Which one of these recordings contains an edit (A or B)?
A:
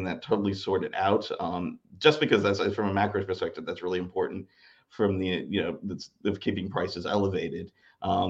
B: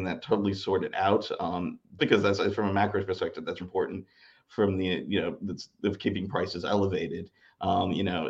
B